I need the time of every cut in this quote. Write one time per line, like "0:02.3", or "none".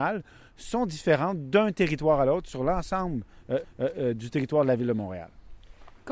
0:03.6